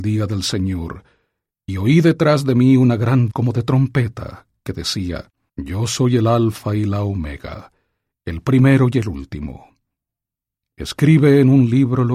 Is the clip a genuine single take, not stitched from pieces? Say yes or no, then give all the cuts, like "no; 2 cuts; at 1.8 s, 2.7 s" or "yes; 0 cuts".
no; 2 cuts; at 3.3 s, 5.5 s